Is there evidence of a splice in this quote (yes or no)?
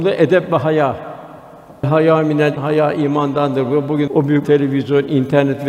yes